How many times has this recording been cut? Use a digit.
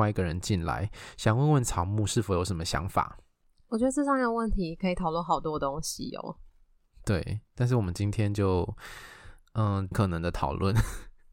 1